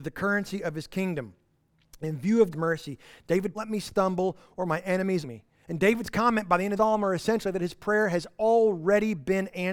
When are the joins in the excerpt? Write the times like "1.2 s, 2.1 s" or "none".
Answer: 2.5 s, 3.5 s, 5.2 s, 5.5 s, 6.8 s